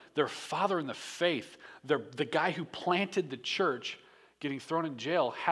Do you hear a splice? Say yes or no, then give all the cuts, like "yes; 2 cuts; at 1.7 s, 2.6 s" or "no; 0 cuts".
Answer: no; 0 cuts